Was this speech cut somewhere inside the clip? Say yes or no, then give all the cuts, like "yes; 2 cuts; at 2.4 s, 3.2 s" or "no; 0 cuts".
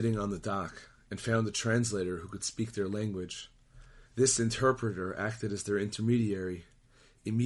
yes; 1 cut; at 4.1 s